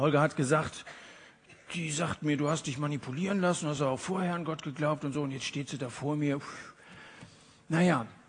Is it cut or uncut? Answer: uncut